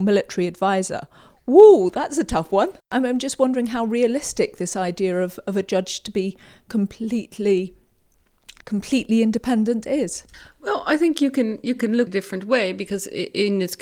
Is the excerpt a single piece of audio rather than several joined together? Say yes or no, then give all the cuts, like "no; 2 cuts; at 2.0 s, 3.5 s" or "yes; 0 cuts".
no; 3 cuts; at 2.8 s, 8.6 s, 12.1 s